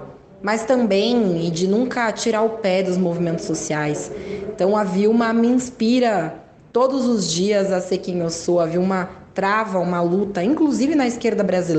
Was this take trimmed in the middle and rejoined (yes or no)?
no